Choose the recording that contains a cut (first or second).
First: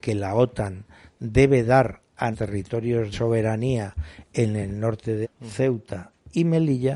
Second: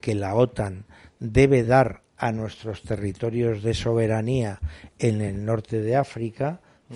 first